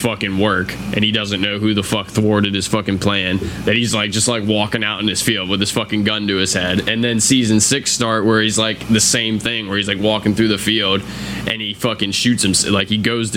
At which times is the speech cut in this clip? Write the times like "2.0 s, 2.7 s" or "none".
none